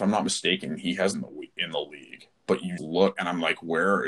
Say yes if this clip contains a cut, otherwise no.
yes